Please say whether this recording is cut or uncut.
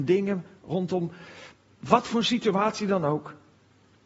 uncut